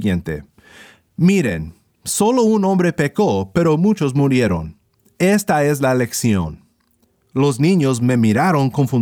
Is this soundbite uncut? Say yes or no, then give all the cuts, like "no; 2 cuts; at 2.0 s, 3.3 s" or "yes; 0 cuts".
yes; 0 cuts